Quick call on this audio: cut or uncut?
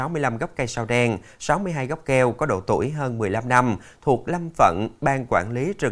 uncut